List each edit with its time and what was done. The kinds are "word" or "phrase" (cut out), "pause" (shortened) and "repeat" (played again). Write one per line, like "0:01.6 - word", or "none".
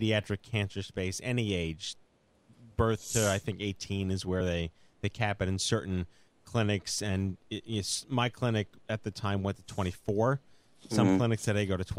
none